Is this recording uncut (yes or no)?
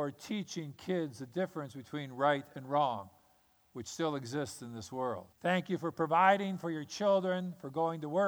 no